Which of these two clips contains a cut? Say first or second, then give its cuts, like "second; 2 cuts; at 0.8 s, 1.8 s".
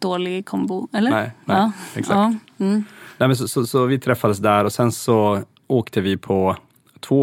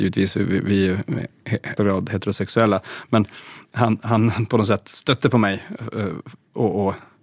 second; 1 cut; at 1.8 s